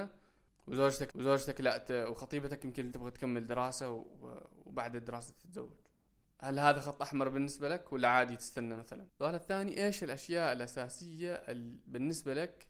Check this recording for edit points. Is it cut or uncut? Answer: cut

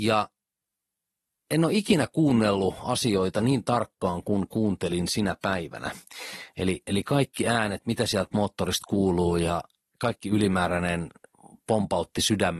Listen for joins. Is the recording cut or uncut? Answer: cut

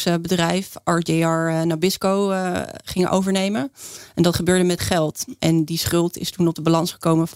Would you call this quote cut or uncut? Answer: cut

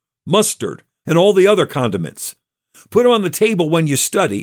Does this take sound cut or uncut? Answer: cut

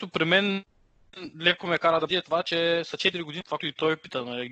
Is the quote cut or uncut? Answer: cut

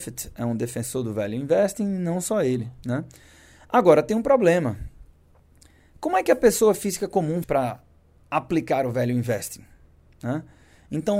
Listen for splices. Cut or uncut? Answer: cut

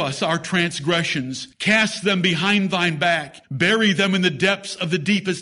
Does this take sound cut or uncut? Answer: cut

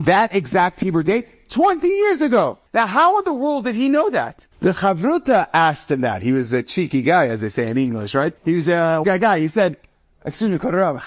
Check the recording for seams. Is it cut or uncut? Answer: cut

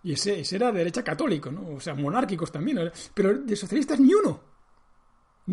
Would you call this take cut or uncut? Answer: uncut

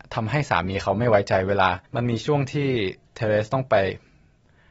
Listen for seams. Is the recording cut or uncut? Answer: cut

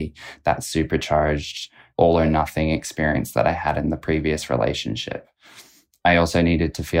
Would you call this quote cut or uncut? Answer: uncut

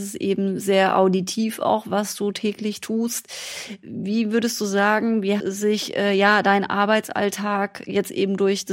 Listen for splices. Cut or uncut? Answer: cut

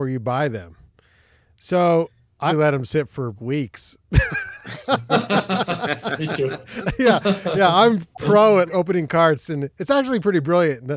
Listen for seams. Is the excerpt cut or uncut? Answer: cut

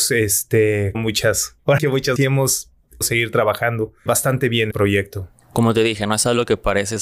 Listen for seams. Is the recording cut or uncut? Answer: cut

